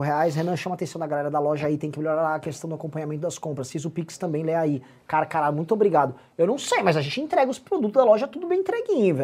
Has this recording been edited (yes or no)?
no